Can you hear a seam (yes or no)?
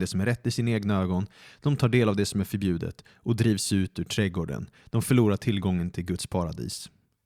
no